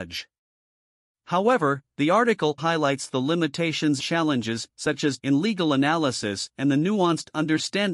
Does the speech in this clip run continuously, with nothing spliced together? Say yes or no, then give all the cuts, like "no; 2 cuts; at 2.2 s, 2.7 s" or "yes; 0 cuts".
no; 4 cuts; at 2.6 s, 4.0 s, 4.7 s, 5.2 s